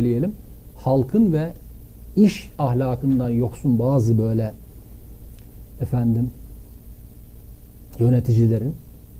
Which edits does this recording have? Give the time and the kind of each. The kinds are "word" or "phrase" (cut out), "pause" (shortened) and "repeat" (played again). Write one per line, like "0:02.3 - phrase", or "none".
none